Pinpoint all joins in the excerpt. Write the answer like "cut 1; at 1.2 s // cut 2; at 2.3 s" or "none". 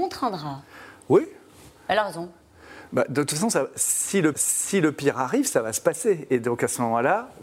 cut 1; at 4.3 s